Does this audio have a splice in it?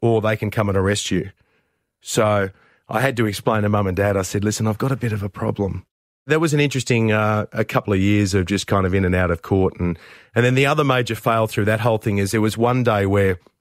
no; 0 cuts

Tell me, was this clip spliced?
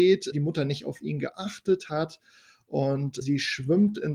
no; 0 cuts

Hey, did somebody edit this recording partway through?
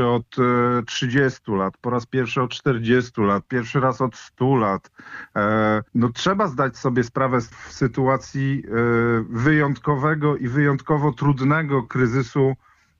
yes; 2 cuts; at 5.9 s, 7.5 s

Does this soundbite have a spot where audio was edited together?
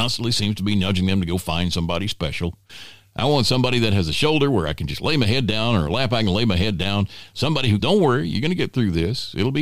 yes; 1 cut; at 7.8 s

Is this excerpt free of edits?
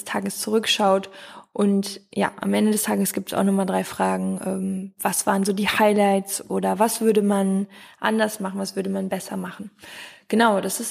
yes; 0 cuts

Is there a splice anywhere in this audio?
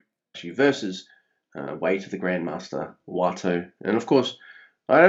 no; 0 cuts

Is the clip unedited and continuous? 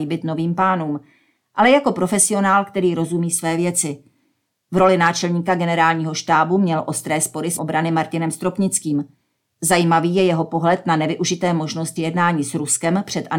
no; 2 cuts; at 7.6 s, 12.0 s

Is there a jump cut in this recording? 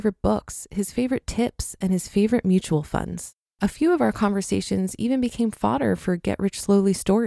yes; 1 cut; at 3.4 s

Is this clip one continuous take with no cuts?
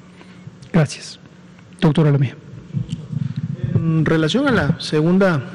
yes; 0 cuts

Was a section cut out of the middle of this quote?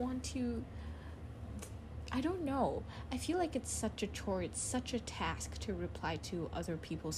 no; 0 cuts

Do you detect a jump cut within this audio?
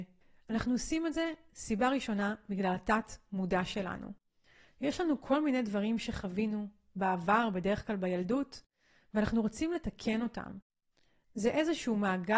no; 0 cuts

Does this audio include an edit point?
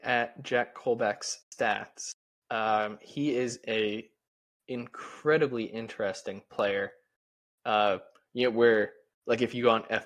no; 0 cuts

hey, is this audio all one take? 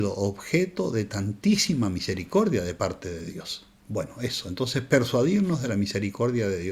no; 1 cut; at 3.8 s

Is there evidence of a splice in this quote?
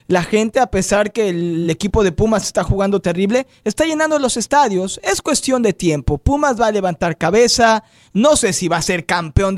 no; 0 cuts

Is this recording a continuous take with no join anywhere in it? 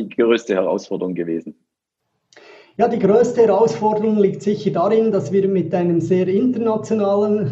yes; 0 cuts

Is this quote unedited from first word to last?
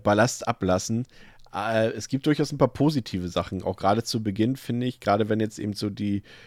yes; 0 cuts

